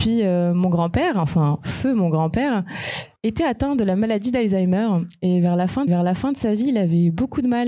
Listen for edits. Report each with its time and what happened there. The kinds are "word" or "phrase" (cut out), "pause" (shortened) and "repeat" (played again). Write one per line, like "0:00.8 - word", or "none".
0:03.2 - pause
0:05.9 - repeat

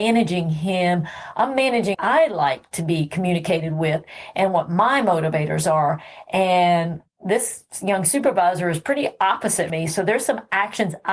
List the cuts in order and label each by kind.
0:01.9 - phrase
0:09.7 - word

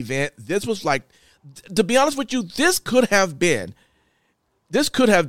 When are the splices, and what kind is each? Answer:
none

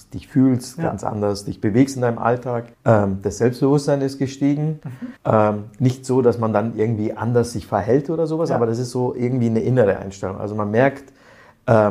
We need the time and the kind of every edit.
0:02.7 - pause
0:05.2 - pause

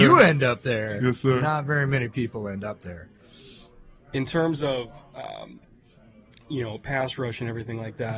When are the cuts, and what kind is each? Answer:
none

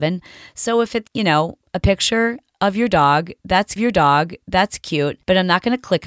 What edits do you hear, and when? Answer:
0:01.1 - word
0:03.8 - repeat

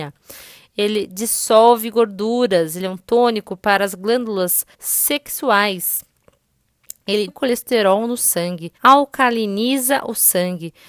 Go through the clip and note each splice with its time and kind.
0:04.7 - pause
0:07.3 - word
0:08.7 - pause

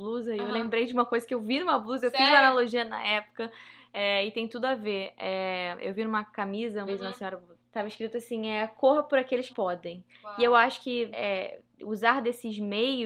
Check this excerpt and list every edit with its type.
0:06.9 - word
0:07.5 - word
0:09.5 - phrase
0:11.1 - word

